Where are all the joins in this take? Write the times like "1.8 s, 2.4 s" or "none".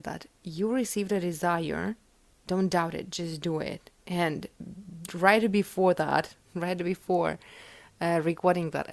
none